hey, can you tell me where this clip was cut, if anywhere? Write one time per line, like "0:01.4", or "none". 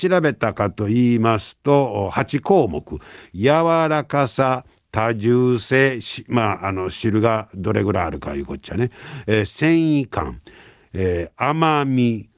none